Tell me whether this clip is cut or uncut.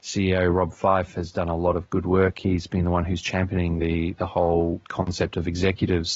uncut